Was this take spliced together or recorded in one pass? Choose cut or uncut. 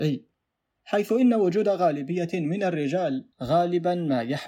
cut